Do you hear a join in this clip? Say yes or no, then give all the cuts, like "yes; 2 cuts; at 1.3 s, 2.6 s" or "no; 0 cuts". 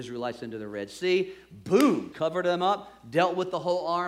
yes; 1 cut; at 2.1 s